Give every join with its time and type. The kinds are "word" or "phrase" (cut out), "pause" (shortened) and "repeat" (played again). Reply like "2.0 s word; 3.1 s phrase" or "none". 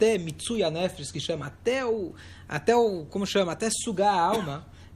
none